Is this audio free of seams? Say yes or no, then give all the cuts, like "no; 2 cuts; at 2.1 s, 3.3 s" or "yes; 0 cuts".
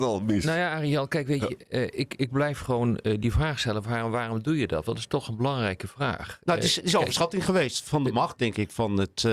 yes; 0 cuts